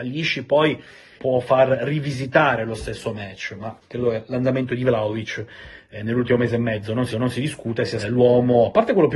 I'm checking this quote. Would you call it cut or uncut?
cut